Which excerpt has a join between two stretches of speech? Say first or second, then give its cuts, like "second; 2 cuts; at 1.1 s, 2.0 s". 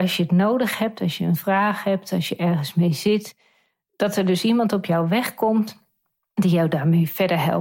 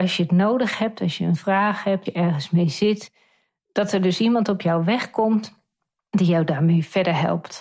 second; 1 cut; at 2.1 s